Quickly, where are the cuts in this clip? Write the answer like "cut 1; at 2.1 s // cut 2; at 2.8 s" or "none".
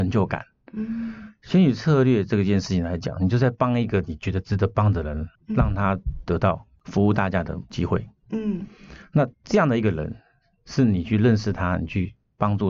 cut 1; at 5.3 s // cut 2; at 6.7 s // cut 3; at 9.3 s